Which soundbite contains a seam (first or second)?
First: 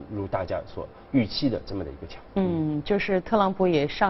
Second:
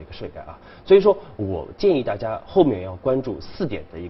first